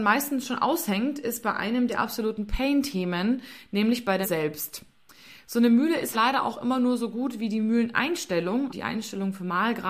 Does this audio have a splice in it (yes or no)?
yes